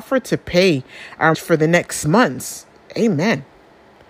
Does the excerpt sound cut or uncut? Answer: cut